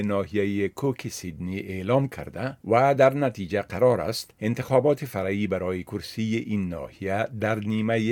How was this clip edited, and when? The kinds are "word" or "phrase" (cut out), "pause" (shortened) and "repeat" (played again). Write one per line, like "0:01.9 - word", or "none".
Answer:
0:02.6 - pause
0:04.3 - pause